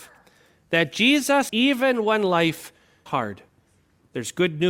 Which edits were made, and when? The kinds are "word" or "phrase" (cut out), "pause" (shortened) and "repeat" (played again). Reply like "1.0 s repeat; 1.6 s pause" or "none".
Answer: 1.5 s phrase; 3.1 s word

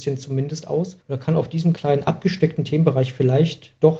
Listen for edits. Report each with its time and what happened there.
1.0 s pause; 1.7 s word

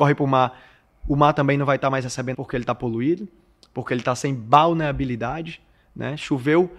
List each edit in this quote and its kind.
2.3 s phrase

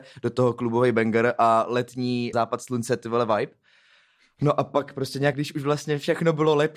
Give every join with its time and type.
2.3 s word; 5.3 s word

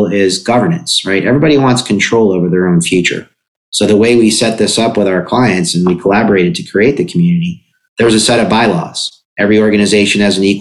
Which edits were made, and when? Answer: none

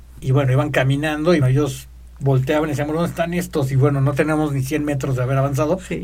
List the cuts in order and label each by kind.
1.4 s word

